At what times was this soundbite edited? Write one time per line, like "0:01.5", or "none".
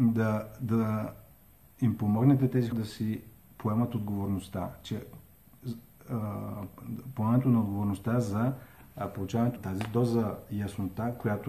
0:02.7
0:09.6